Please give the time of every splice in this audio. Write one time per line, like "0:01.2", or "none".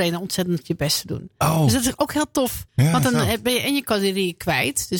0:02.7